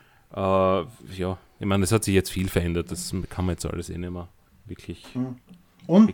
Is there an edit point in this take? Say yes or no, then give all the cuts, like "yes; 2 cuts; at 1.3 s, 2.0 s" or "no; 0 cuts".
yes; 1 cut; at 4.5 s